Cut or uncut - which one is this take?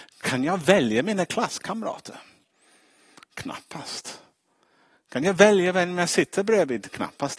uncut